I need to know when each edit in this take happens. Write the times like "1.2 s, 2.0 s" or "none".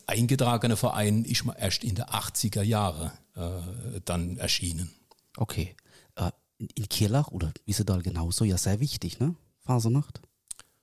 4.4 s